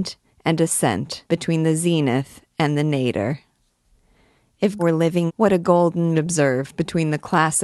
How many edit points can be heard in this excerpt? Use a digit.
4